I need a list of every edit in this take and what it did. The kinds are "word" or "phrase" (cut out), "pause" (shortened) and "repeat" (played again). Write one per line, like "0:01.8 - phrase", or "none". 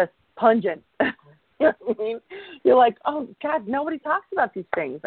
none